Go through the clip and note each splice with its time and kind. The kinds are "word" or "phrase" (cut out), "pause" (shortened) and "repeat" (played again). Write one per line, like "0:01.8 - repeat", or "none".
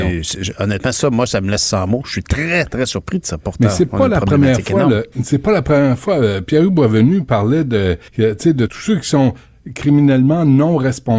0:05.1 - pause
0:08.1 - pause
0:08.7 - word